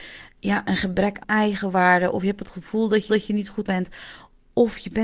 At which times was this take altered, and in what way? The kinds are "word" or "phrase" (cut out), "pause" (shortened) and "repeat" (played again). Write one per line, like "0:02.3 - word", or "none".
0:01.2 - word
0:03.1 - repeat
0:03.6 - word